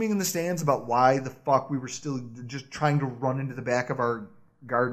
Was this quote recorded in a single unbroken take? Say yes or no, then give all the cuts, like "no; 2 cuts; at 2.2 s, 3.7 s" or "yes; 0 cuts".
yes; 0 cuts